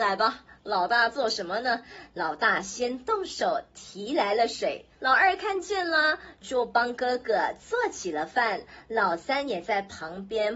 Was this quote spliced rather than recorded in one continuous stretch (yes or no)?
yes